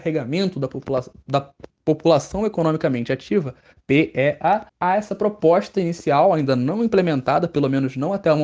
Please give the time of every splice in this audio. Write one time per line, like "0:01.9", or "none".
0:04.7